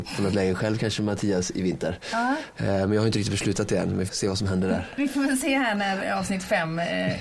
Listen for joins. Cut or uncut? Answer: cut